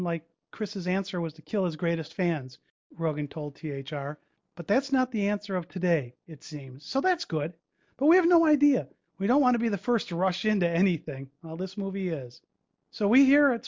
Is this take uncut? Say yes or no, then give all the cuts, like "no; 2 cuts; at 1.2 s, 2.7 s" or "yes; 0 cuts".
yes; 0 cuts